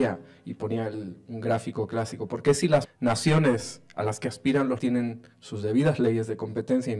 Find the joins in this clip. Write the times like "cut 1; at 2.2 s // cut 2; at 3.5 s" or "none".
cut 1; at 2.9 s // cut 2; at 4.8 s